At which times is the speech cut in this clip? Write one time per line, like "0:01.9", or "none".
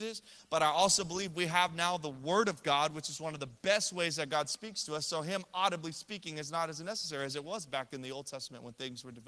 none